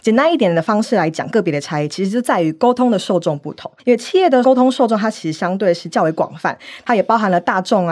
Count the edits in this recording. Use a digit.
1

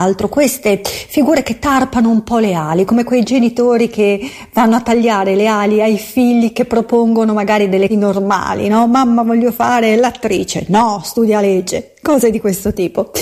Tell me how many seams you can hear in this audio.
1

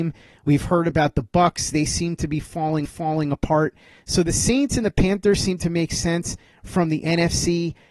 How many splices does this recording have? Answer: 1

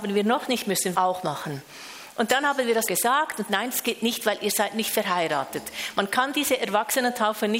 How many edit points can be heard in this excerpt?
3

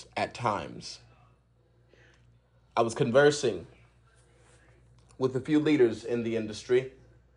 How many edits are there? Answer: 0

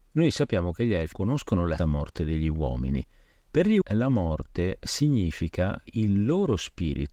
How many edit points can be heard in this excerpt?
4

